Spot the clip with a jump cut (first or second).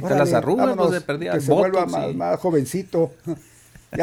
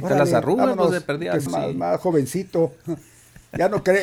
second